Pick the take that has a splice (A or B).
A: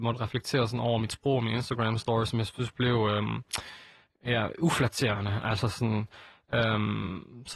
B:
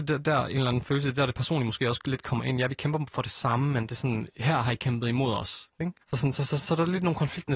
B